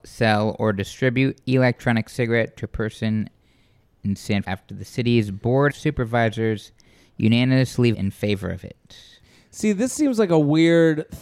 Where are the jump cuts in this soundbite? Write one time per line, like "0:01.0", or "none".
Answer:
0:01.4
0:04.4
0:05.7
0:07.9